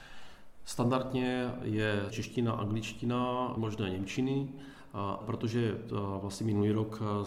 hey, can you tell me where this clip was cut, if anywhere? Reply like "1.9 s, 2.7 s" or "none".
2.1 s, 3.6 s, 5.2 s